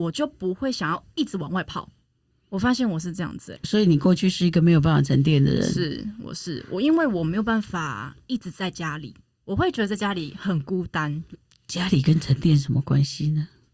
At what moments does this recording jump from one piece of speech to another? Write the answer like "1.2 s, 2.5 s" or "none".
3.6 s